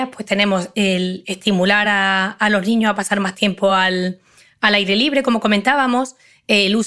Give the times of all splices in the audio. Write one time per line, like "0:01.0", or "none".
none